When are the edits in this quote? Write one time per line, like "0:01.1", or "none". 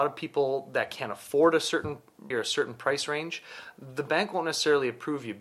0:02.3